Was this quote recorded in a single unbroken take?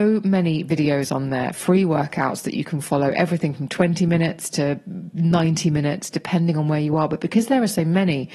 yes; 0 cuts

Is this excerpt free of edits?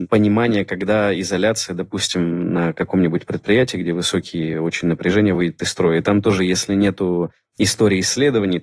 yes; 0 cuts

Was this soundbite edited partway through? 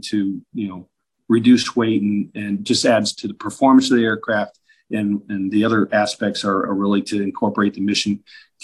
no; 0 cuts

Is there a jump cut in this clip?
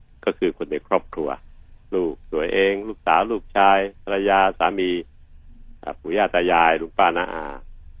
yes; 1 cut; at 1.8 s

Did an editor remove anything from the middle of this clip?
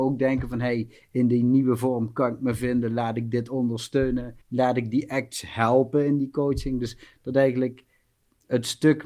yes; 1 cut; at 4.4 s

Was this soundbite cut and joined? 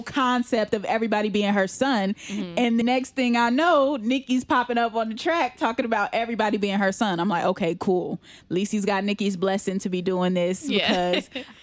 yes; 1 cut; at 2.8 s

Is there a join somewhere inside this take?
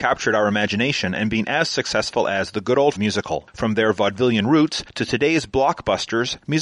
yes; 1 cut; at 3.0 s

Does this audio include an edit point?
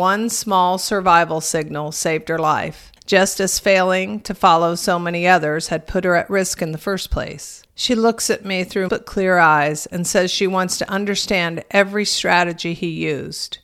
yes; 3 cuts; at 3.0 s, 7.7 s, 8.9 s

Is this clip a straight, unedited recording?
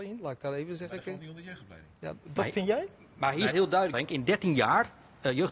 no; 2 cuts; at 3.5 s, 3.9 s

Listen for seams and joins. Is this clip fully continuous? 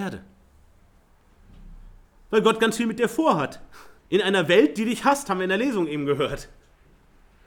no; 1 cut; at 4.0 s

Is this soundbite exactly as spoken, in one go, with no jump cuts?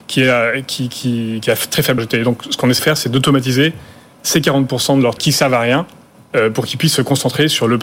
no; 3 cuts; at 2.0 s, 2.8 s, 5.2 s

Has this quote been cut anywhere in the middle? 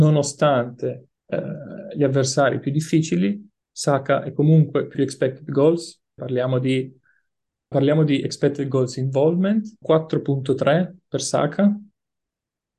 yes; 6 cuts; at 1.2 s, 3.6 s, 4.9 s, 6.2 s, 7.7 s, 9.8 s

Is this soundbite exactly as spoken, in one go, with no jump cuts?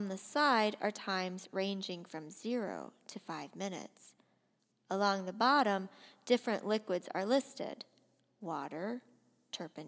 yes; 0 cuts

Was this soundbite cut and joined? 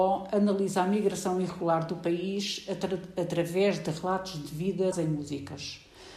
yes; 1 cut; at 4.9 s

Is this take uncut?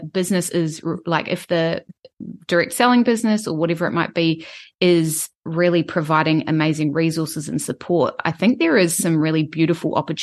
yes; 0 cuts

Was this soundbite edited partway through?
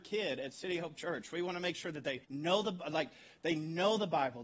yes; 1 cut; at 2.2 s

